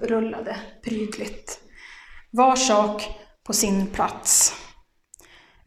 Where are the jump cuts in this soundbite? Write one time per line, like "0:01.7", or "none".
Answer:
none